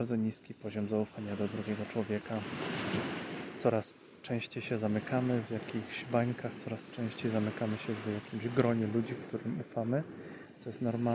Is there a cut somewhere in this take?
no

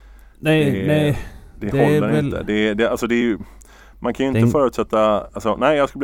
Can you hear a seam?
no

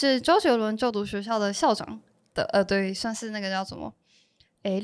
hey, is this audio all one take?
yes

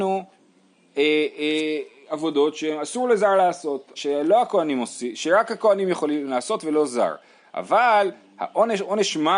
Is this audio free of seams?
no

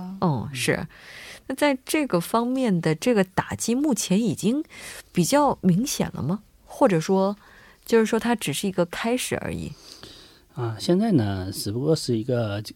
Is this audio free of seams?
yes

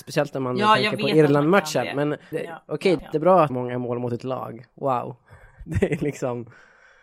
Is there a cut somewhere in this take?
yes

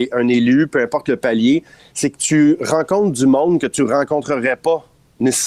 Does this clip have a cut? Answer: no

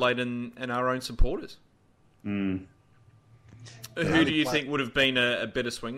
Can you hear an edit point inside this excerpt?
no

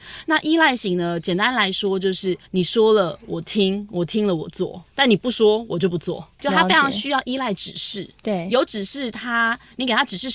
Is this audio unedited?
no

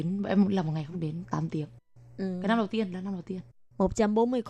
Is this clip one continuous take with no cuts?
yes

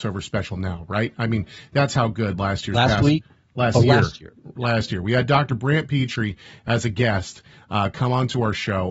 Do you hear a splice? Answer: no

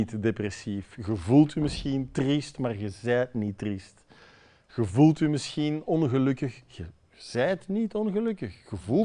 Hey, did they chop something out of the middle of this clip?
no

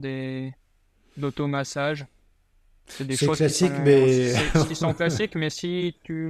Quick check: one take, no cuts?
yes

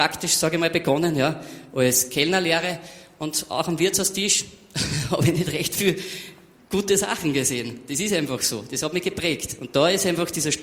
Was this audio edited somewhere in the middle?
no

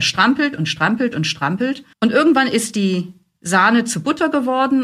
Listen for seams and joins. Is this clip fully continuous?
no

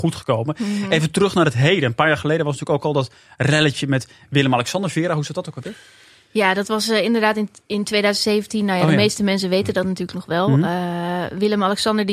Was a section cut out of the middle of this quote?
no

